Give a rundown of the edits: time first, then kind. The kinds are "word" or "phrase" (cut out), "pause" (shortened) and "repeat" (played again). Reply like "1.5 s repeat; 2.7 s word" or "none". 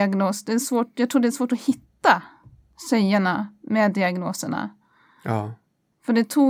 none